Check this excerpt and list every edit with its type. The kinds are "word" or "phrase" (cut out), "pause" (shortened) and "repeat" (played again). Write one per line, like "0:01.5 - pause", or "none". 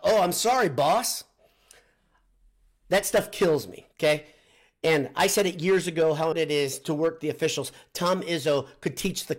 0:03.9 - pause
0:06.3 - word